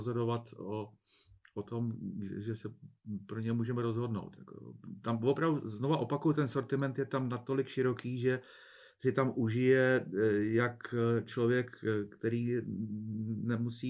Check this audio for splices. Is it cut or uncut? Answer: uncut